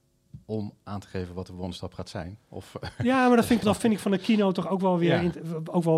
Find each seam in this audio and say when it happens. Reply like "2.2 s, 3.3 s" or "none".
2.4 s, 3.6 s